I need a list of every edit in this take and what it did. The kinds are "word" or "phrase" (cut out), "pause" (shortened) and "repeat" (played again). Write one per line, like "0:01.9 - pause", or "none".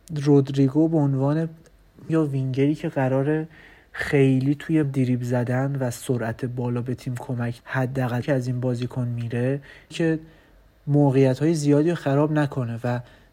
0:02.1 - word
0:04.8 - word
0:07.6 - word
0:08.2 - word
0:09.9 - word